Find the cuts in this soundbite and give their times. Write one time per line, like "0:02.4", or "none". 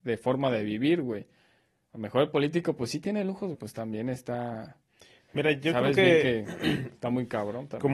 0:03.5

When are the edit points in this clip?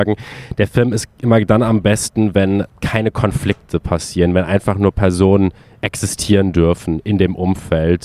none

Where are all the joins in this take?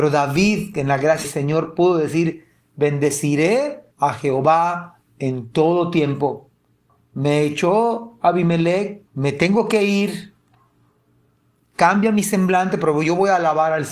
0:01.2
0:03.9
0:06.9
0:09.1

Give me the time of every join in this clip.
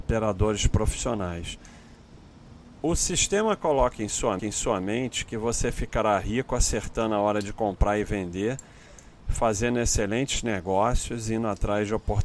0:02.8
0:04.4

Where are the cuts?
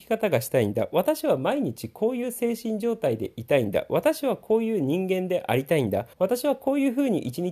0:06.1

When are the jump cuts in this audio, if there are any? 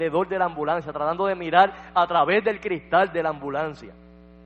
none

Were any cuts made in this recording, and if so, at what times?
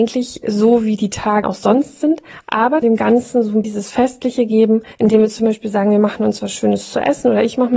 0:01.4
0:02.8
0:03.6
0:04.9

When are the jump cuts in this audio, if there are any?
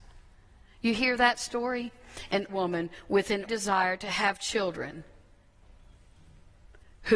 0:02.5
0:03.5

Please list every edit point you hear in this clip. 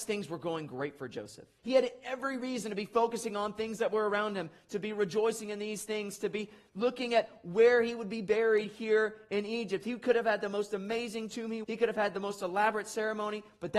0:01.6
0:11.6

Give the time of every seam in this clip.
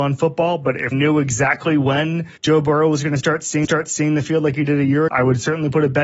0:00.9
0:02.4
0:03.6
0:05.1

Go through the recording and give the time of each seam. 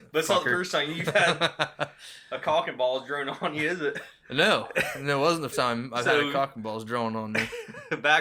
0:05.5

